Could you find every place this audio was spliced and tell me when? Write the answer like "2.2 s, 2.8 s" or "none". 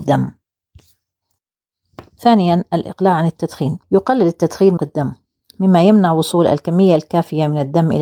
3.8 s, 4.8 s